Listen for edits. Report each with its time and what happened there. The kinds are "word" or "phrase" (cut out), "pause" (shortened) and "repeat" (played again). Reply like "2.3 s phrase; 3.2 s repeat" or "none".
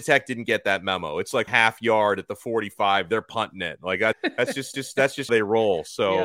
1.5 s phrase; 4.1 s word; 4.7 s repeat; 5.3 s word